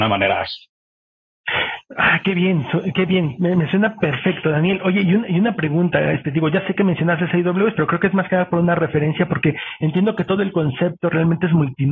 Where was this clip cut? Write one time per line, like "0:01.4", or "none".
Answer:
none